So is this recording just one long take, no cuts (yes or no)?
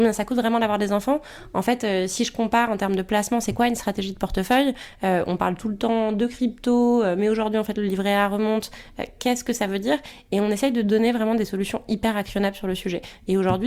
yes